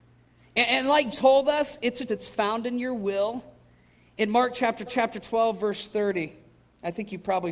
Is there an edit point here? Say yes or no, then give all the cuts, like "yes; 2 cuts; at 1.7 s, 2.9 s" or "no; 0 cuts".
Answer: yes; 3 cuts; at 1.1 s, 2.1 s, 4.9 s